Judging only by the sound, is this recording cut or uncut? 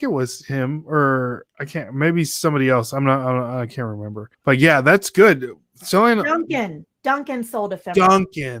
cut